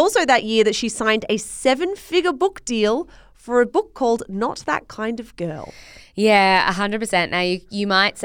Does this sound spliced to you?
no; 0 cuts

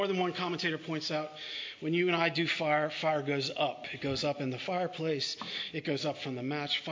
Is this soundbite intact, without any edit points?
yes; 0 cuts

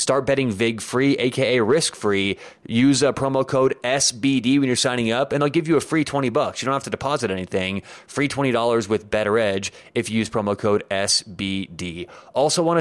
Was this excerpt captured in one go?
yes; 0 cuts

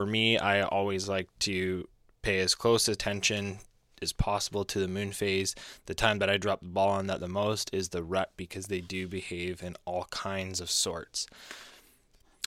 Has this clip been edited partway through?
no; 0 cuts

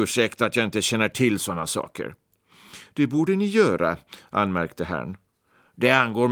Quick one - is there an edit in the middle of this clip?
no; 0 cuts

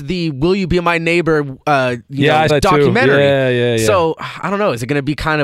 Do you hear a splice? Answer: yes; 1 cut; at 2.5 s

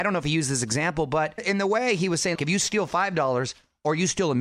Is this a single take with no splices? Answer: no; 2 cuts; at 1.4 s, 2.3 s

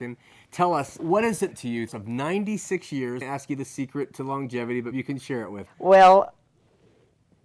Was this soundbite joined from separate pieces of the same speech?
yes; 6 cuts; at 1.0 s, 1.5 s, 1.9 s, 3.2 s, 4.9 s, 5.7 s

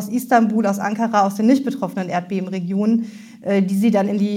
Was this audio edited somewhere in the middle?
no; 0 cuts

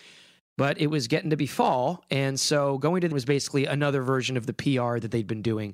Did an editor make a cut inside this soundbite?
yes; 1 cut; at 3.1 s

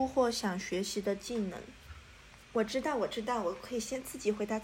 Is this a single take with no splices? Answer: no; 1 cut; at 2.4 s

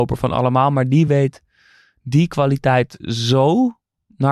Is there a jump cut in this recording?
no; 0 cuts

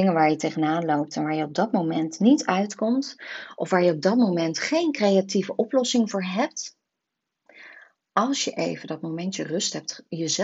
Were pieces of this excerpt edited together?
no; 0 cuts

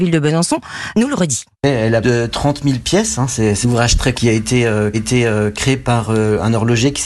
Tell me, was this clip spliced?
yes; 6 cuts; at 0.9 s, 1.5 s, 2.0 s, 3.6 s, 4.1 s, 4.9 s

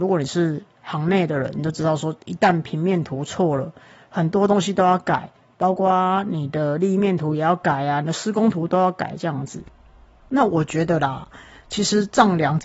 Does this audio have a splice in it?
no; 0 cuts

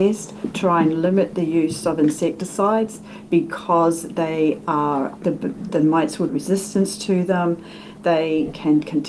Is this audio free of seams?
no; 2 cuts; at 5.2 s, 6.3 s

